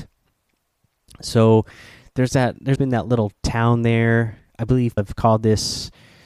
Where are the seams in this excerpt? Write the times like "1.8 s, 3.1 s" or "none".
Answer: 2.8 s, 5.0 s